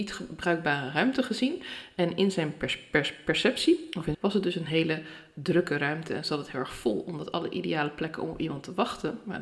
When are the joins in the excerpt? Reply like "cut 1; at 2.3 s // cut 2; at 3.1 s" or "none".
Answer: cut 1; at 4.1 s

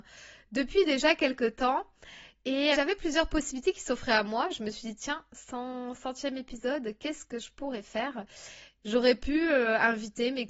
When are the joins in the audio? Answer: cut 1; at 2.7 s

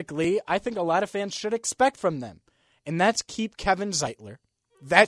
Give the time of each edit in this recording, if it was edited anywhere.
none

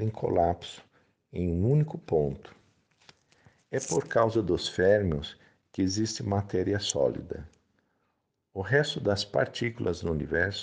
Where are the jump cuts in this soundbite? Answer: none

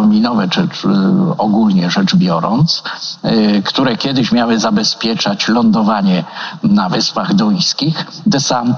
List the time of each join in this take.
none

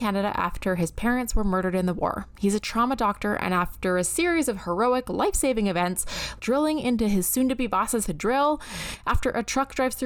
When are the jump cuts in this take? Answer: cut 1; at 6.4 s // cut 2; at 8.1 s

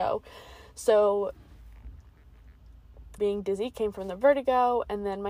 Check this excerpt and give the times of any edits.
cut 1; at 3.2 s

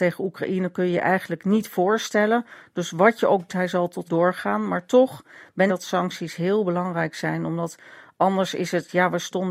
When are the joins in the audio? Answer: cut 1; at 3.5 s // cut 2; at 4.0 s // cut 3; at 5.7 s

